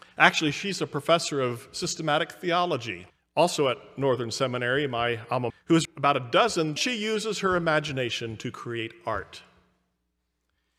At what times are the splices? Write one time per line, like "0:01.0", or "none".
0:03.1
0:05.5
0:05.8
0:06.8